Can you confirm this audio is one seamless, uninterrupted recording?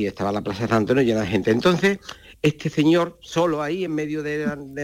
yes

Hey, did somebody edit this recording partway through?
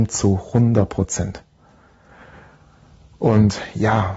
no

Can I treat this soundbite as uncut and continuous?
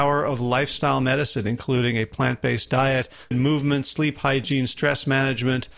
no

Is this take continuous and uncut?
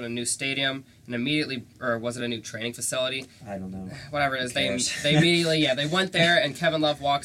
yes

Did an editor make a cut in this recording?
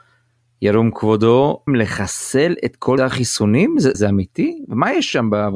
yes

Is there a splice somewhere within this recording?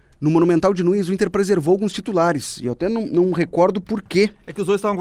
no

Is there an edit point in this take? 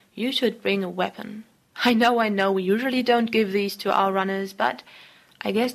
no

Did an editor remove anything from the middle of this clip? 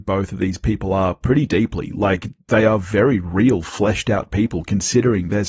no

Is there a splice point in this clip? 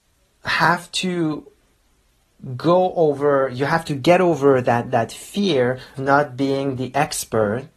yes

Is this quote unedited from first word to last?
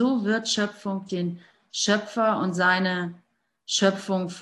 no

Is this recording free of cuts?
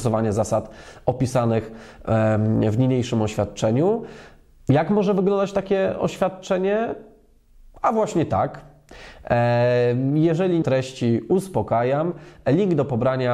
no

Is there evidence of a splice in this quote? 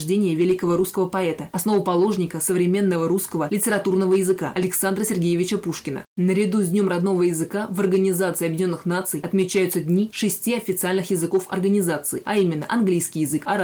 no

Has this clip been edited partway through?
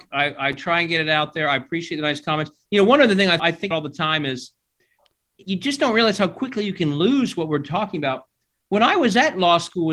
yes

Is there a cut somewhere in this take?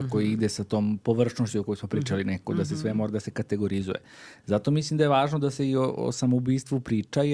no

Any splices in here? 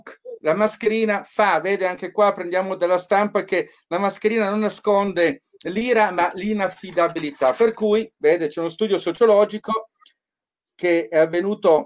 no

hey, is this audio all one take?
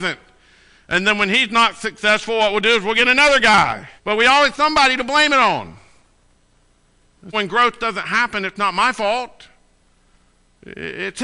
no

